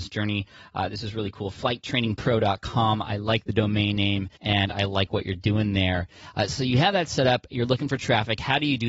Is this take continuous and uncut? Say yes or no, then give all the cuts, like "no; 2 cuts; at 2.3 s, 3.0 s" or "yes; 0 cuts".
no; 1 cut; at 4.4 s